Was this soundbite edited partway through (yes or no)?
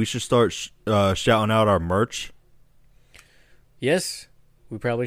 no